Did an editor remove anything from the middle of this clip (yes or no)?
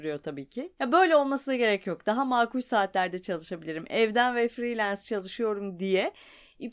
no